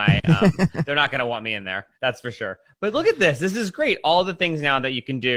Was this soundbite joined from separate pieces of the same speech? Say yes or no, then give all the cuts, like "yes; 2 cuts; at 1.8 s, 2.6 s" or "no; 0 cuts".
yes; 1 cut; at 1.9 s